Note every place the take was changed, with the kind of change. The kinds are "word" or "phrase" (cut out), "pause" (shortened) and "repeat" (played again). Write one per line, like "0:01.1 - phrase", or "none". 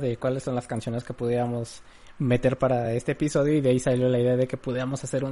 none